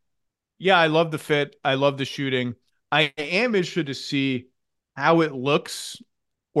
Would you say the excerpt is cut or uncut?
uncut